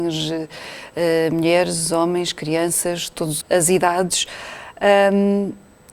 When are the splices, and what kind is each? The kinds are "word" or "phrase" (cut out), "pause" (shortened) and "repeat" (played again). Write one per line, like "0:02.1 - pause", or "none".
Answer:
0:03.4 - word

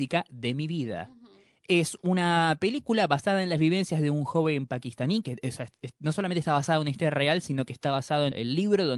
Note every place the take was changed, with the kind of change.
none

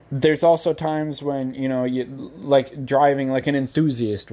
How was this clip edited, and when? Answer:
none

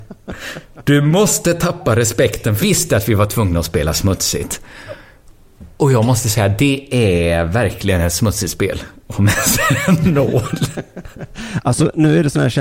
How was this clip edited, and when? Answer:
0:02.6 - phrase

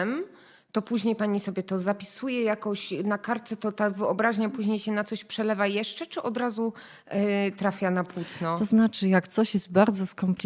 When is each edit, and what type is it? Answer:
none

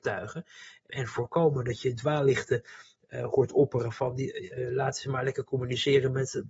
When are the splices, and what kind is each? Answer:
none

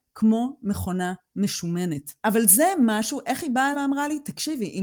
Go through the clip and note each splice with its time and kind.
0:02.2 - pause
0:03.7 - word

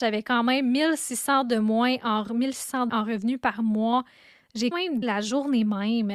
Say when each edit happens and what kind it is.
0:02.9 - phrase
0:04.7 - word
0:05.0 - word

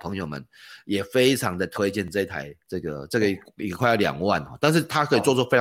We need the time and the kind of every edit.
0:02.6 - pause

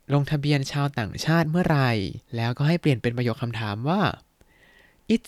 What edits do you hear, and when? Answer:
0:02.3 - pause

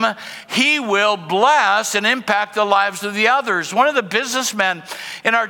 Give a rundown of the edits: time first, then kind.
none

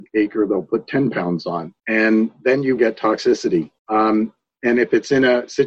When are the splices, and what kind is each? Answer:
0:01.8 - pause
0:02.8 - word
0:03.8 - pause

